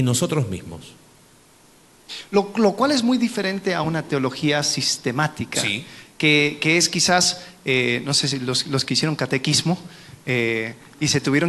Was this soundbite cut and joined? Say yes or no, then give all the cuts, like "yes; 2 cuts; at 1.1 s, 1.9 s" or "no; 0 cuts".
no; 0 cuts